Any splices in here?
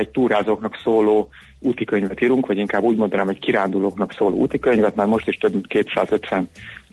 no; 0 cuts

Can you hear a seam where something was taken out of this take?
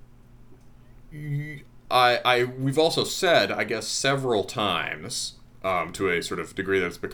no; 0 cuts

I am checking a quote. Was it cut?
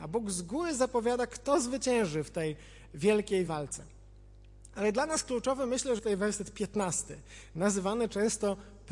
yes; 2 cuts; at 3.5 s, 6.0 s

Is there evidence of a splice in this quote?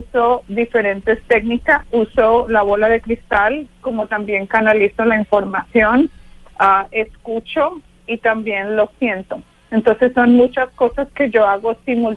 no; 0 cuts

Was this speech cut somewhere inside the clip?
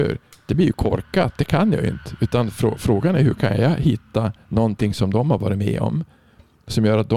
no; 0 cuts

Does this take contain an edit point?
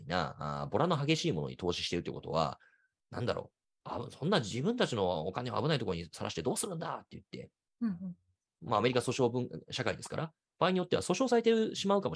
no; 0 cuts

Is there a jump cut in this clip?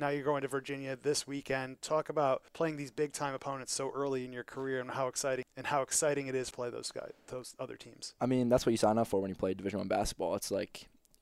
yes; 2 cuts; at 2.5 s, 6.5 s

